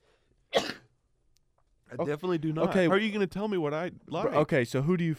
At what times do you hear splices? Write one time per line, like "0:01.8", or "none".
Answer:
0:02.9